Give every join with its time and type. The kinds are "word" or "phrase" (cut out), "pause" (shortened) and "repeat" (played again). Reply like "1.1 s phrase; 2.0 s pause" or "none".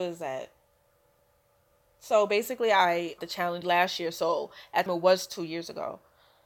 3.2 s phrase; 3.6 s word; 4.9 s phrase